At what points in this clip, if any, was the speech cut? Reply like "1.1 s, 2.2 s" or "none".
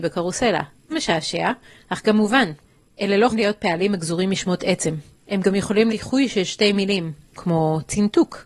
0.9 s, 3.3 s, 5.9 s

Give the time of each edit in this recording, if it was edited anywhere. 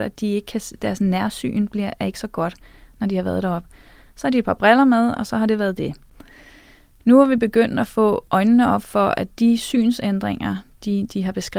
none

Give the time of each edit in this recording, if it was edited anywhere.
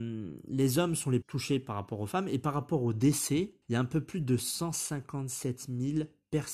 1.2 s, 3.6 s

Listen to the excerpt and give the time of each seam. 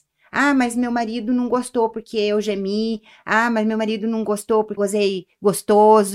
4.8 s

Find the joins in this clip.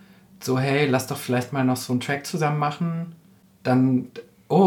none

